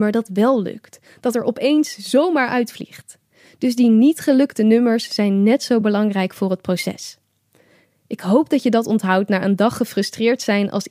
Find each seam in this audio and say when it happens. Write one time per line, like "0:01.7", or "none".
none